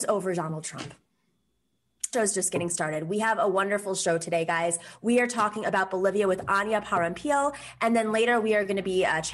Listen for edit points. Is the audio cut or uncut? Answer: cut